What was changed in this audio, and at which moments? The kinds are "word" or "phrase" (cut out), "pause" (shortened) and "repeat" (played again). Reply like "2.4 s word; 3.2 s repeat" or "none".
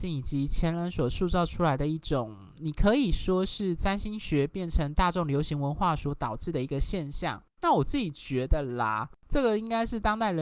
2.5 s word; 7.5 s pause; 9.2 s pause